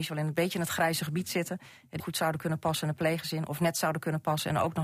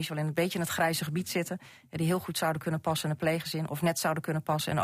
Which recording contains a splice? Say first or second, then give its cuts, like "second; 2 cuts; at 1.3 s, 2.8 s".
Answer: first; 1 cut; at 2.0 s